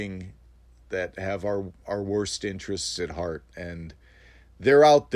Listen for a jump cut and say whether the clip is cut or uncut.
uncut